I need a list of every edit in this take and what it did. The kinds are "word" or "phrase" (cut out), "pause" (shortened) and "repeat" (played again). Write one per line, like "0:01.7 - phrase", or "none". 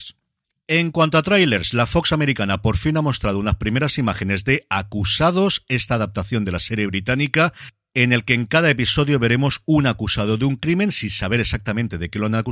none